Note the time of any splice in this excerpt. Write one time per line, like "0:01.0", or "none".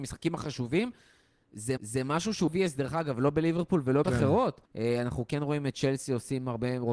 0:01.8
0:02.5
0:04.0
0:04.7